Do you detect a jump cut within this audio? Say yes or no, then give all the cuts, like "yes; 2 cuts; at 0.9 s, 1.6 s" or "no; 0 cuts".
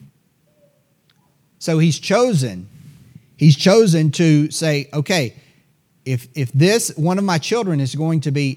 no; 0 cuts